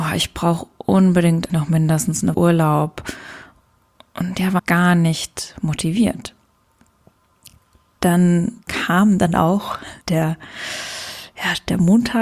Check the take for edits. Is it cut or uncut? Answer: cut